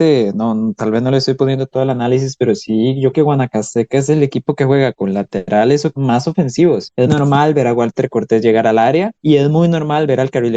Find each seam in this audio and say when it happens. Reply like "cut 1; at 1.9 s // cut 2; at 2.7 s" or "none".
cut 1; at 3.1 s // cut 2; at 4.9 s // cut 3; at 5.9 s // cut 4; at 7.1 s